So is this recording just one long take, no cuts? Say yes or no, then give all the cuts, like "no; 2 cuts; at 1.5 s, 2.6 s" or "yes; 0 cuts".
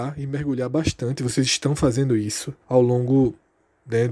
no; 1 cut; at 2.6 s